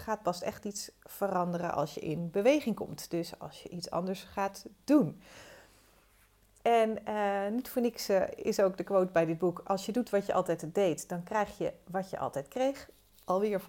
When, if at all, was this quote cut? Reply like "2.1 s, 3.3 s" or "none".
none